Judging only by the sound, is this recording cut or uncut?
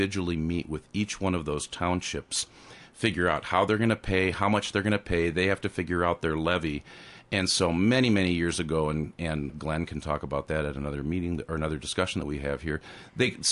cut